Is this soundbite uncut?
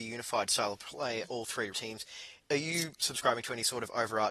no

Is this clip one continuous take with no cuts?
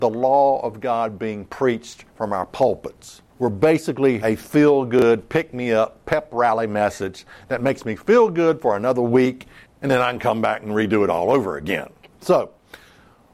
no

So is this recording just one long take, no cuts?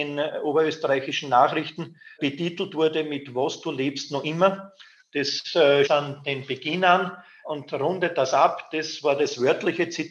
no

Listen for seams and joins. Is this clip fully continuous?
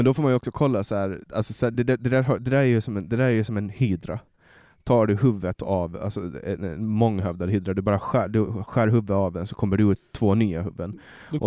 yes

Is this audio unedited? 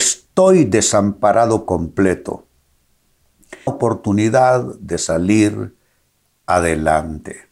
no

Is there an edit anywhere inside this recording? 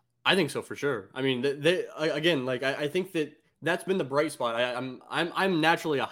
no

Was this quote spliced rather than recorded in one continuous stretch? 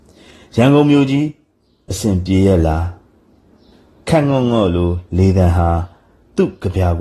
no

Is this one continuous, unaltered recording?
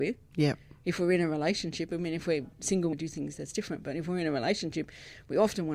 no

